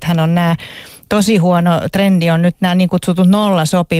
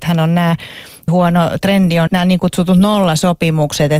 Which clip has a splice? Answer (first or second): second